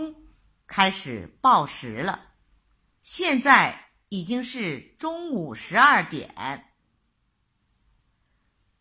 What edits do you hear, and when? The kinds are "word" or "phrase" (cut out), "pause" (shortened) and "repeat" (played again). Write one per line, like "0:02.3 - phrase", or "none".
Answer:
none